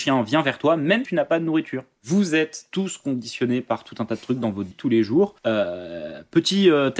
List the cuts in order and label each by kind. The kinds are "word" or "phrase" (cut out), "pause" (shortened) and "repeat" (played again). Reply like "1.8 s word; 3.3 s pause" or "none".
1.1 s word; 4.7 s word; 5.4 s pause